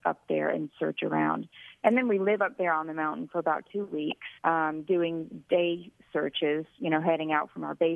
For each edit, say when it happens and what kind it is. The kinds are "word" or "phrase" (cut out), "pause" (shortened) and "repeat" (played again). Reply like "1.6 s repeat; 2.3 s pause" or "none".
4.4 s pause